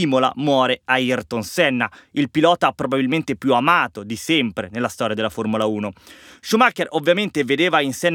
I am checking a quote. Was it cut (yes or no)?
no